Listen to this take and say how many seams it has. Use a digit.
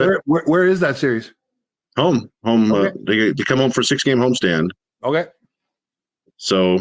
0